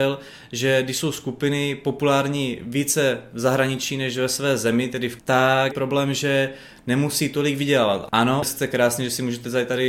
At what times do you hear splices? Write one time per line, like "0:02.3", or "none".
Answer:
0:05.2
0:05.7
0:08.4

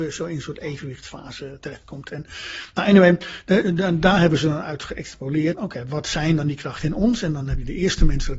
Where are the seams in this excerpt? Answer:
0:03.6
0:05.5

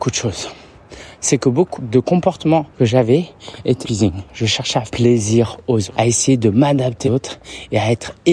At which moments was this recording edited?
0:01.8
0:02.7
0:03.8
0:04.9
0:05.9
0:07.0

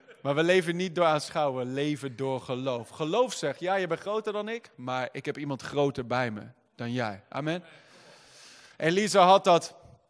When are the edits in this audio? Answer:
none

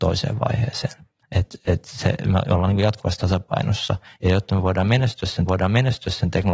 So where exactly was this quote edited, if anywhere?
0:05.5

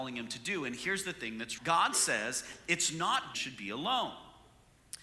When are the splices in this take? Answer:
0:01.6
0:03.3

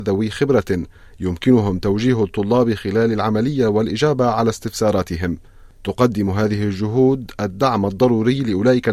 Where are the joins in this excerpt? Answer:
none

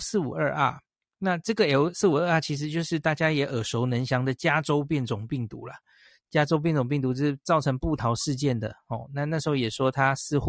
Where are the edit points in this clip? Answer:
none

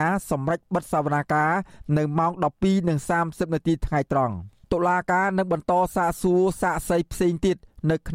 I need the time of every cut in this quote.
0:04.6

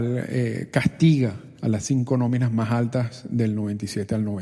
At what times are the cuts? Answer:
none

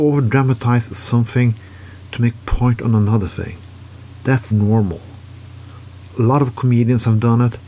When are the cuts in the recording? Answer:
0:04.5

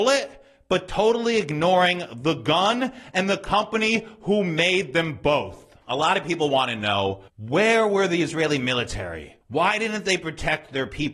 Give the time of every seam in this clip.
0:05.8
0:07.3
0:09.4

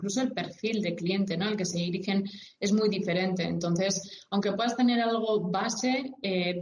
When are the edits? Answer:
none

